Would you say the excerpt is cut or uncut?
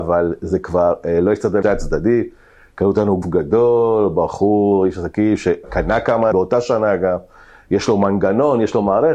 cut